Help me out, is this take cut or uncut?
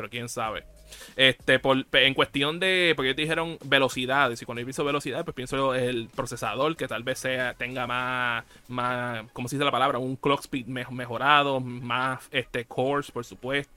uncut